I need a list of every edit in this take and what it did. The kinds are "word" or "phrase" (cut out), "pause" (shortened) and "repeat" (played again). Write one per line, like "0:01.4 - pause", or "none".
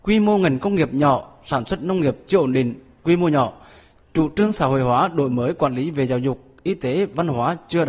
none